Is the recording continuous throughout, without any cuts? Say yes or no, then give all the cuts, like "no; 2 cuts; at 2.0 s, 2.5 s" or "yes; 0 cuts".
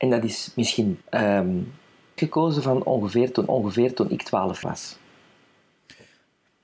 no; 4 cuts; at 1.0 s, 2.2 s, 3.5 s, 4.6 s